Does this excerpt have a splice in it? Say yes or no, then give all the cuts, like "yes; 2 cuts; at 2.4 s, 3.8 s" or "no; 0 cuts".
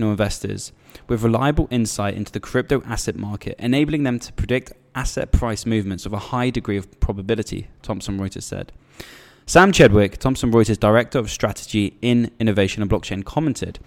no; 0 cuts